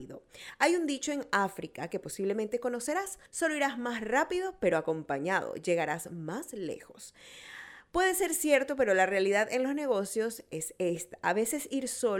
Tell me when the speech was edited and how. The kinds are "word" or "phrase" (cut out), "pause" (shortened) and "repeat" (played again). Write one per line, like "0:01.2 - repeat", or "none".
0:03.3 - pause